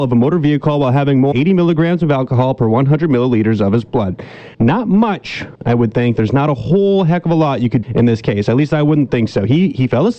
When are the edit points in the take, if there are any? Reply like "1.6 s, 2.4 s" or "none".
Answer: 1.3 s, 4.5 s, 5.5 s, 7.8 s